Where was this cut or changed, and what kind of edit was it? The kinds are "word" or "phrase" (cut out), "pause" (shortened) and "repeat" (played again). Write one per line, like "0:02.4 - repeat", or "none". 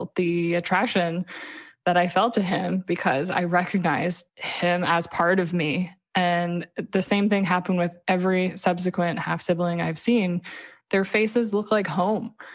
0:04.3 - pause